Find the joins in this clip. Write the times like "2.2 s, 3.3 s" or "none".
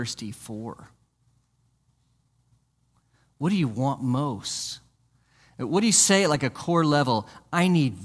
none